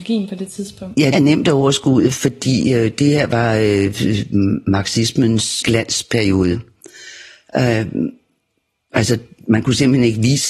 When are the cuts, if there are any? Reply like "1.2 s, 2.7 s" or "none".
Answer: 1.1 s, 5.6 s

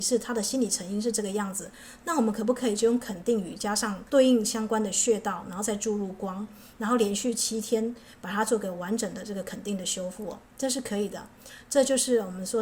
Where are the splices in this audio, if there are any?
4.1 s, 10.5 s

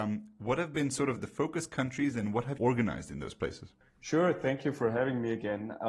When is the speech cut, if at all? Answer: 1.2 s, 2.6 s

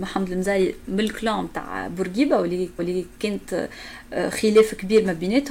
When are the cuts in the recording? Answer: 2.8 s

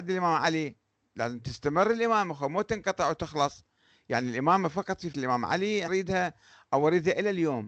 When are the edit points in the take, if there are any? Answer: 5.1 s, 5.9 s

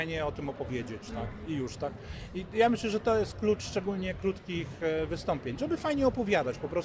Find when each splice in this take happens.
none

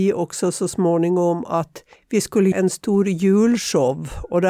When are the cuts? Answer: 1.9 s, 2.5 s

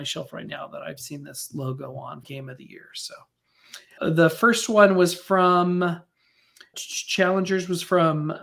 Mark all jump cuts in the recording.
2.2 s, 4.0 s, 6.7 s

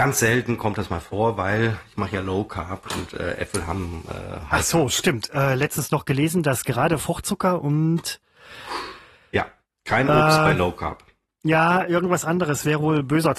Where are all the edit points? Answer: none

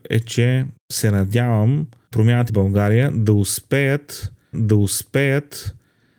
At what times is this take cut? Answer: 2.1 s, 2.5 s, 4.5 s

